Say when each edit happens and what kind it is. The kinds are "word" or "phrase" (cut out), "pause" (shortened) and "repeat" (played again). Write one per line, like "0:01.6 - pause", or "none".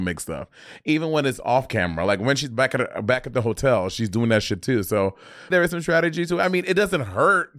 0:05.5 - word